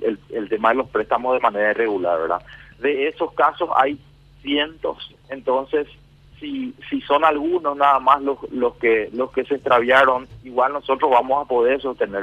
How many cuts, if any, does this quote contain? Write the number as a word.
one